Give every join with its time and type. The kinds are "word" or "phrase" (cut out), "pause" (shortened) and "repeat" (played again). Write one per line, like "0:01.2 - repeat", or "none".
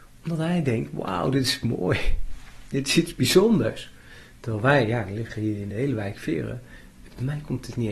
none